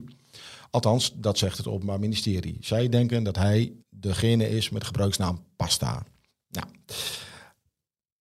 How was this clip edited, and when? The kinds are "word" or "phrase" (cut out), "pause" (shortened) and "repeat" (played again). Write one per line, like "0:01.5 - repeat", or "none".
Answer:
0:03.8 - pause
0:06.3 - pause

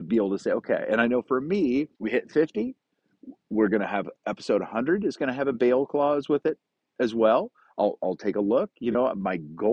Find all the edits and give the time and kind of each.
0:01.9 - pause
0:04.2 - pause

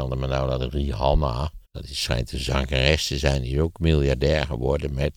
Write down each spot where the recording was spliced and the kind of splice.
0:01.6 - pause

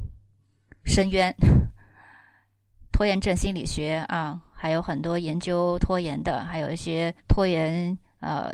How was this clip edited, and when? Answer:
0:07.2 - pause

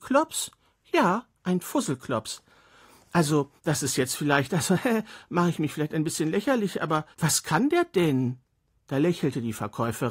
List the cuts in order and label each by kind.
0:03.6 - pause
0:07.1 - pause
0:08.7 - pause

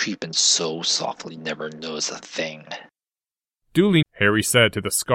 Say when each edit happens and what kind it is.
0:01.4 - word
0:04.0 - word

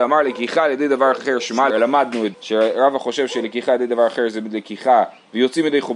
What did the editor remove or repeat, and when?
0:01.7 - phrase
0:02.3 - word

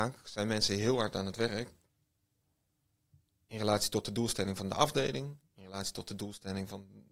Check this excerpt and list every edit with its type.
none

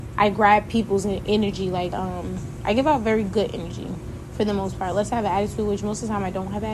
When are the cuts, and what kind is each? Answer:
0:01.9 - word

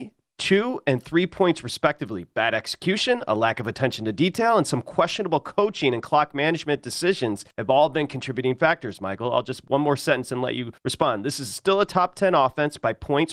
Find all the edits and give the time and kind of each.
0:07.5 - pause
0:10.8 - pause

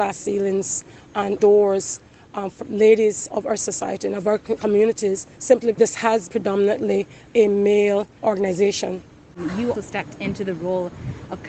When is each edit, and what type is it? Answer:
0:01.4 - word
0:02.6 - word
0:03.3 - word
0:05.7 - word
0:06.3 - word
0:09.7 - word

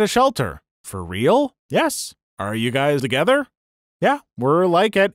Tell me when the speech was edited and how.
0:01.6 - pause
0:03.0 - word

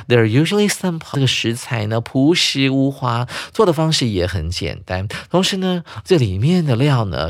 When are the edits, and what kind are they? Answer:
0:01.1 - word

